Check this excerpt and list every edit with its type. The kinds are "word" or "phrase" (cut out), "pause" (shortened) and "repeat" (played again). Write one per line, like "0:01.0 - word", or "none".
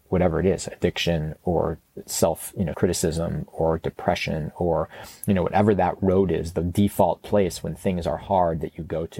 0:02.0 - word
0:02.7 - word